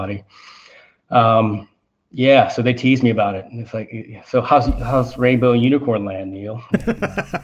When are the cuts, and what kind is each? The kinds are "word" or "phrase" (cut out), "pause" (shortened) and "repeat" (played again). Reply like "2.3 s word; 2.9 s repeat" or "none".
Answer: none